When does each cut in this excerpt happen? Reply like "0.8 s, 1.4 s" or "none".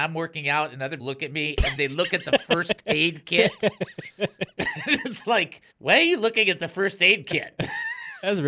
1.0 s, 1.7 s, 5.7 s